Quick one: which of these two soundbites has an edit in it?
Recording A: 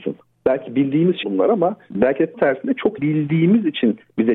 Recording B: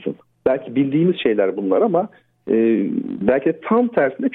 A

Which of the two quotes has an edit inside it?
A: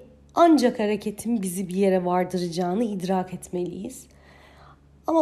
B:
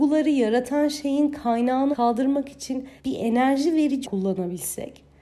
B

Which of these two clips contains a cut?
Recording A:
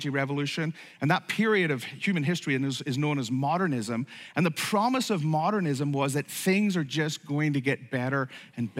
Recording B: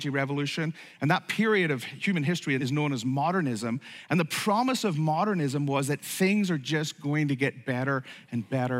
B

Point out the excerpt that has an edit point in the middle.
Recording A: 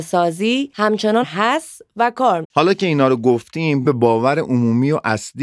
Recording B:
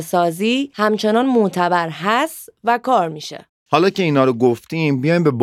A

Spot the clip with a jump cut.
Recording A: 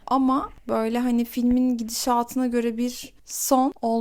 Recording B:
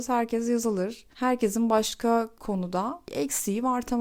B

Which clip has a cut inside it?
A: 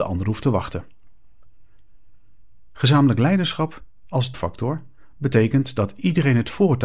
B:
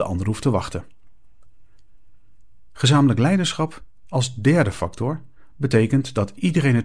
A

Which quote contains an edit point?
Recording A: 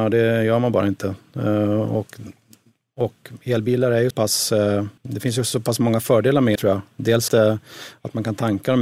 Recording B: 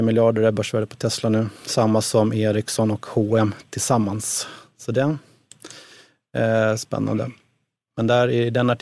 A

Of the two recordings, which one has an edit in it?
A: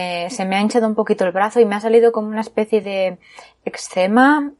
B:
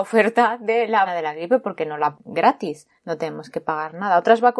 B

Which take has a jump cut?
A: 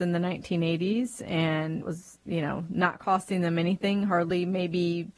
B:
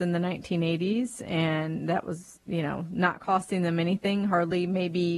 A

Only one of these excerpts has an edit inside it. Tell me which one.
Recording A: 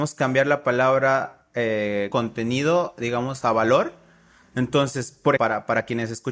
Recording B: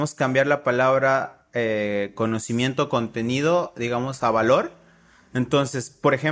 A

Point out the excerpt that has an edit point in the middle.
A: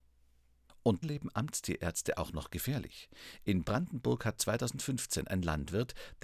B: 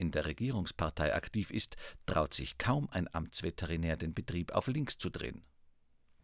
A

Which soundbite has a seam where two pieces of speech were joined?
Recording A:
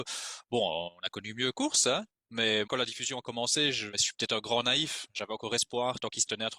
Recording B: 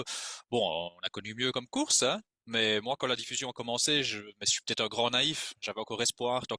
A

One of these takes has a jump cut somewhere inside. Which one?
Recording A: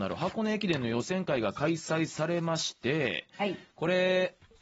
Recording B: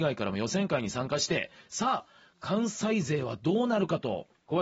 A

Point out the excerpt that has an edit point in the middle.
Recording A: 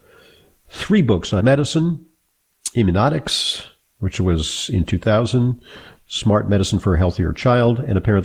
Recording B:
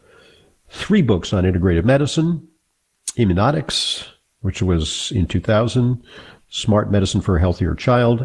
A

